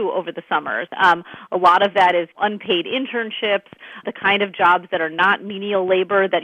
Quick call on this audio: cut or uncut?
cut